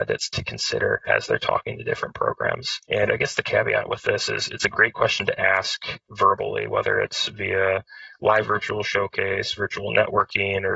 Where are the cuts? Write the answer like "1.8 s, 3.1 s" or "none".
8.4 s